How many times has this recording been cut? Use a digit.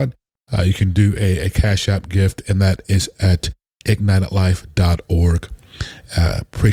0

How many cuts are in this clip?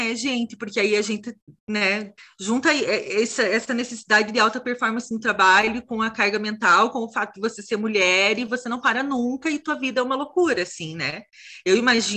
1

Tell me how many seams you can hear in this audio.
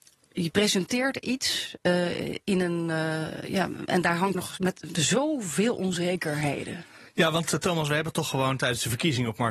1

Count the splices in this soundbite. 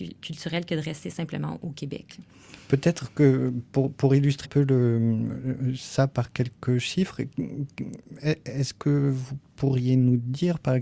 1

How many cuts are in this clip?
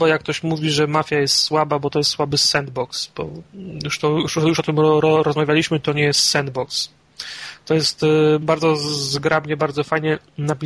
1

